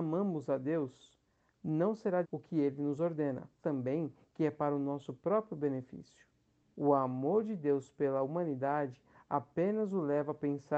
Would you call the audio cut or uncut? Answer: cut